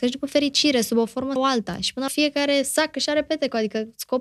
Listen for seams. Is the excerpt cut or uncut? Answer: cut